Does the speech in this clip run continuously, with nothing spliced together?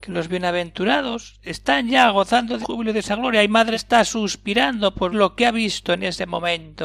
no; 3 cuts; at 2.6 s, 3.7 s, 5.1 s

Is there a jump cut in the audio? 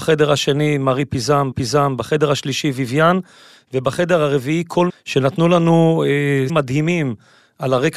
yes; 3 cuts; at 1.5 s, 4.9 s, 6.5 s

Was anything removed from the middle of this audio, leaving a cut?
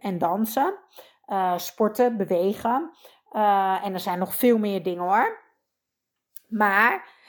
no; 0 cuts

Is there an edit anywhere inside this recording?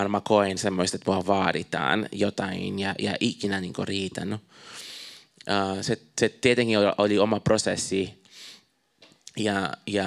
no; 0 cuts

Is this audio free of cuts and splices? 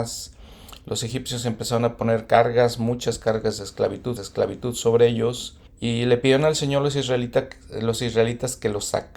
no; 2 cuts; at 4.2 s, 5.7 s

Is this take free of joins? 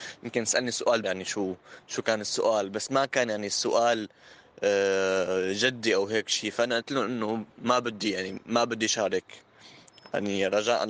no; 2 cuts; at 1.0 s, 7.5 s

